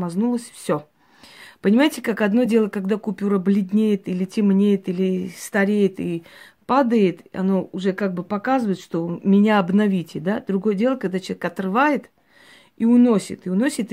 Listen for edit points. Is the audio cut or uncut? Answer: uncut